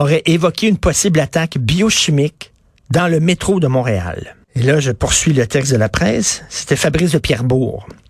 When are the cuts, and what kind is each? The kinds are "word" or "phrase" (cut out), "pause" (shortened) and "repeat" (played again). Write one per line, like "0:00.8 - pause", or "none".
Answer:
0:04.4 - pause